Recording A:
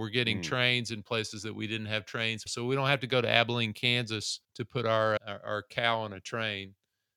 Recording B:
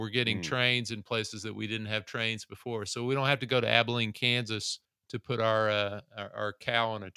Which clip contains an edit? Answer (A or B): A